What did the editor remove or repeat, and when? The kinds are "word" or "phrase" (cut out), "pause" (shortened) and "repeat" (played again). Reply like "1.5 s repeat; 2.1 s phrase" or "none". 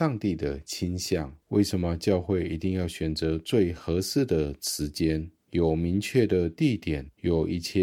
1.4 s pause; 5.4 s pause